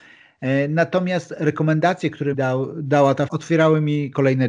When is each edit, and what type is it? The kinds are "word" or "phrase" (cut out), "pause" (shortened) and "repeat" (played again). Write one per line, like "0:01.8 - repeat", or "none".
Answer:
0:02.3 - word
0:03.3 - word